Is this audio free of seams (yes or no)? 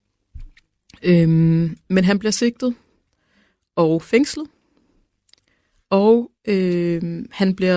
no